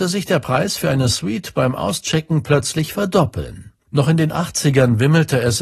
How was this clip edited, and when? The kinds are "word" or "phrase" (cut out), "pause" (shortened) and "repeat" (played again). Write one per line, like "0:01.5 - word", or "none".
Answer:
0:03.8 - pause